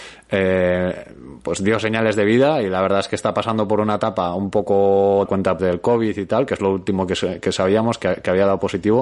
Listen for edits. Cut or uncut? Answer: cut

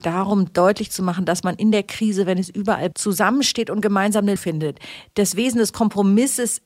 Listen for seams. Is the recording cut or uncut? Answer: cut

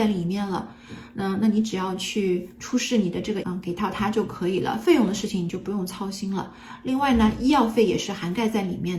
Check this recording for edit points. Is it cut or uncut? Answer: cut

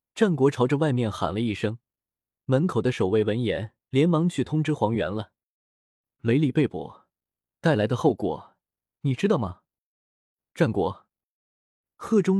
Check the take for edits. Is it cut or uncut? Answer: cut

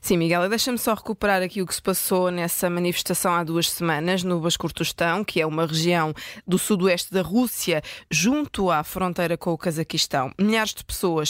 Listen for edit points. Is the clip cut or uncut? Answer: uncut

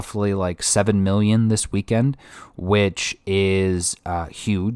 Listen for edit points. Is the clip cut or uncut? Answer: uncut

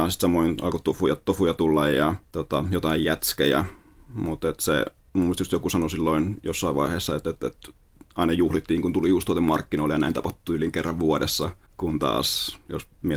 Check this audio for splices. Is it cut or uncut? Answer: uncut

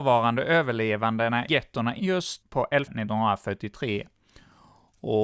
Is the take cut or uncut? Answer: cut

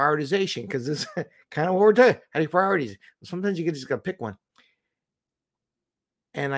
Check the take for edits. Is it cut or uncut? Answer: uncut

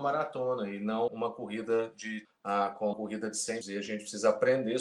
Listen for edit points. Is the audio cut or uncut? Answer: cut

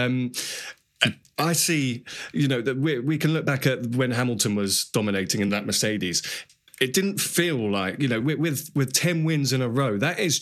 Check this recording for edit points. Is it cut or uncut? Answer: uncut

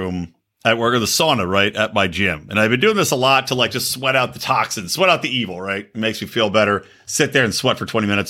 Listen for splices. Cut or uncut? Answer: uncut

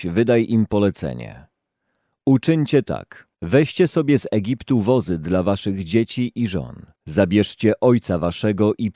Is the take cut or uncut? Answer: cut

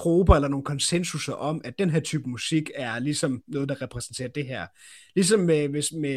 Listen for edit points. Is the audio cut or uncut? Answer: uncut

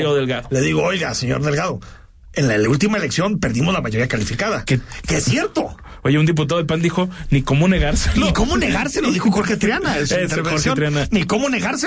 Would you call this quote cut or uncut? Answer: uncut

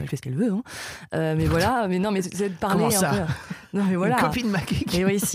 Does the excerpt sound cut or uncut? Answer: uncut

